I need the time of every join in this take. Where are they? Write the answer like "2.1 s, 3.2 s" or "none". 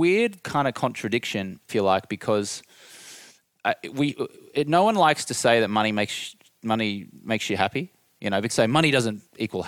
1.7 s, 8.5 s